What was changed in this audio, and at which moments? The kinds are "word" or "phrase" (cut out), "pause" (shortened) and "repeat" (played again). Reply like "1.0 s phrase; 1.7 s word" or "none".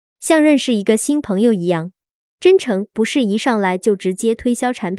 none